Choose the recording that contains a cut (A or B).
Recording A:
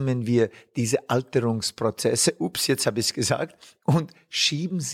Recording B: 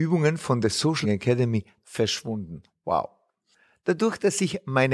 B